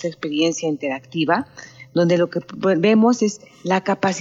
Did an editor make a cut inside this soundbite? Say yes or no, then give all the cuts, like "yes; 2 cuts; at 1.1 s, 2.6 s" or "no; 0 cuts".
no; 0 cuts